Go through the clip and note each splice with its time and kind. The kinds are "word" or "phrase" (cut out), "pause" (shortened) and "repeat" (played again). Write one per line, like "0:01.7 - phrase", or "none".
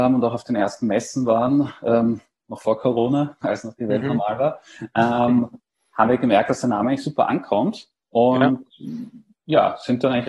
none